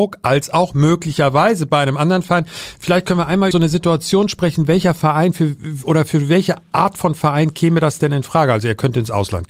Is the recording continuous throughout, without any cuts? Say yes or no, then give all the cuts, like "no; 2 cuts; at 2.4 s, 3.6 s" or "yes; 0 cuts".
no; 1 cut; at 3.5 s